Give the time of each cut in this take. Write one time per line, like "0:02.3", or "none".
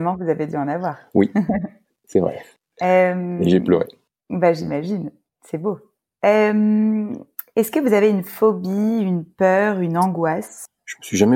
none